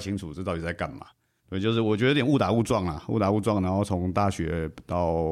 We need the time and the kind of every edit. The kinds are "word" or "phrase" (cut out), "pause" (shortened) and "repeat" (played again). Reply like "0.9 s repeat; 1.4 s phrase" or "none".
1.4 s pause